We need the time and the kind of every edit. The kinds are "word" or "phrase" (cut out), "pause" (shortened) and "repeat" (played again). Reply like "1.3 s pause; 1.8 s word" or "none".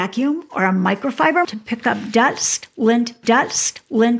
1.4 s word; 3.2 s repeat

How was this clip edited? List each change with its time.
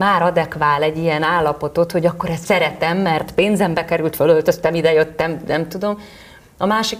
2.4 s word

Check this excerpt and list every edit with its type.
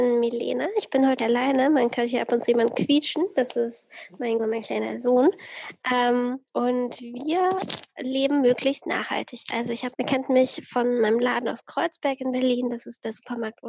1.2 s phrase; 4.4 s word; 6.5 s pause; 9.9 s word

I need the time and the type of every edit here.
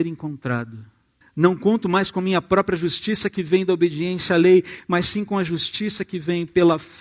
1.2 s pause

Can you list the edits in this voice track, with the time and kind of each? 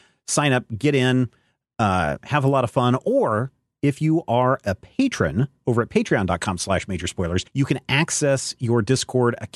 7.5 s pause

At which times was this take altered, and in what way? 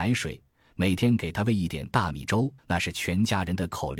2.6 s pause

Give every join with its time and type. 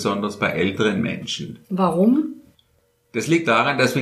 1.6 s pause

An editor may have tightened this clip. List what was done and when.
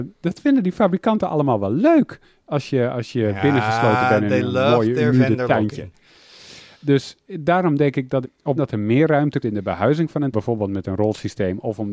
8.2 s word; 8.6 s word; 9.4 s word; 10.3 s word

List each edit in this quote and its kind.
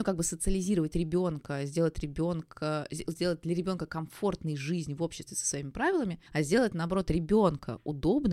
6.3 s pause

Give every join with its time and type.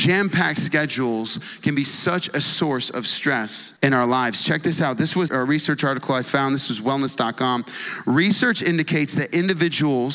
3.8 s pause; 5.3 s word

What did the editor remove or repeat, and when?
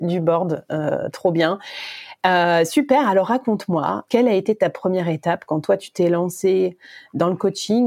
4.1 s word

